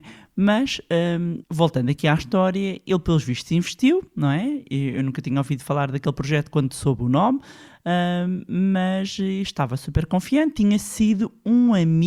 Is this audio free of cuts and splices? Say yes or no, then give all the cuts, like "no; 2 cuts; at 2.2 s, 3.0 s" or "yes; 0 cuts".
no; 1 cut; at 1.4 s